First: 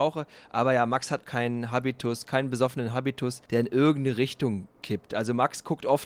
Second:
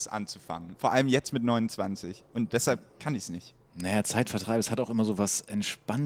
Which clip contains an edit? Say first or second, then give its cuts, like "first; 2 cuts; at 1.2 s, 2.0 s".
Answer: first; 3 cuts; at 1.2 s, 3.5 s, 4.7 s